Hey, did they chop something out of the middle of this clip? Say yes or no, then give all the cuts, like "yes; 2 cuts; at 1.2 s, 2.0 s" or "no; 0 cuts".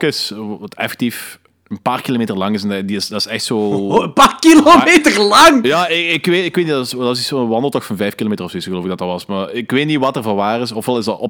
no; 0 cuts